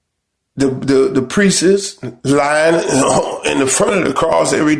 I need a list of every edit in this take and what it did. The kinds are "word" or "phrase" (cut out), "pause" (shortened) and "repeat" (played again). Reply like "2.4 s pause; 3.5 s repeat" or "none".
none